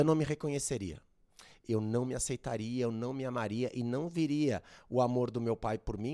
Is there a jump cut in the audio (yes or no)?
no